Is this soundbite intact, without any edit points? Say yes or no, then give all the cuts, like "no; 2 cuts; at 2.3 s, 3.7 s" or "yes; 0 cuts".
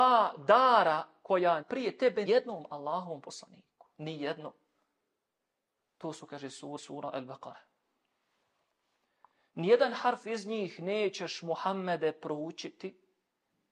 no; 3 cuts; at 1.6 s, 2.2 s, 6.8 s